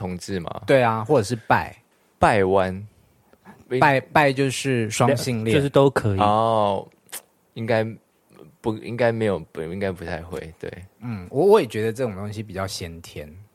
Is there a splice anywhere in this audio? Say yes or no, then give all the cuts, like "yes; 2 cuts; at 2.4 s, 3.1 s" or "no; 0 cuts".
no; 0 cuts